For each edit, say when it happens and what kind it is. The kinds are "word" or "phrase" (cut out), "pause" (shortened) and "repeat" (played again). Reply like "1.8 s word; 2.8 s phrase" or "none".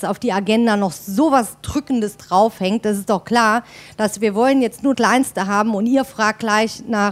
4.9 s word